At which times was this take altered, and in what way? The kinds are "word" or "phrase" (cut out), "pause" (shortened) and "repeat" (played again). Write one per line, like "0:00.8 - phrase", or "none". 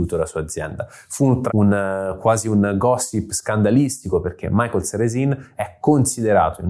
0:01.5 - word